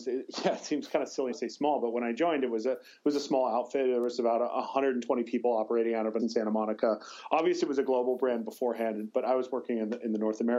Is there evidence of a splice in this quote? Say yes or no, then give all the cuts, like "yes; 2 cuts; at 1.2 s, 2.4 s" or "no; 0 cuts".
yes; 2 cuts; at 1.3 s, 6.2 s